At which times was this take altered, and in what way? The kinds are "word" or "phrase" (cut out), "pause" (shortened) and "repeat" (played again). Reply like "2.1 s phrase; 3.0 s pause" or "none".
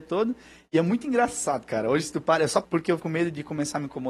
2.6 s word; 3.0 s word